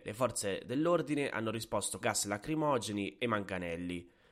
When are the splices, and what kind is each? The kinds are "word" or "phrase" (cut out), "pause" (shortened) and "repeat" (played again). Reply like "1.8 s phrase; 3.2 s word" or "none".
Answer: 2.0 s word